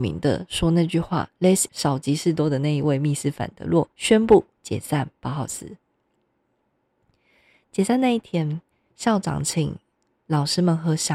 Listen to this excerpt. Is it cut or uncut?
cut